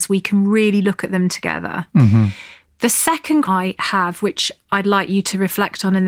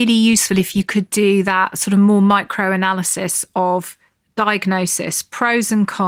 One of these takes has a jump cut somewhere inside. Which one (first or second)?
first